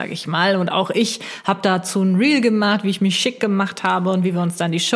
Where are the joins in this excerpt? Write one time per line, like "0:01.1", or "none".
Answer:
none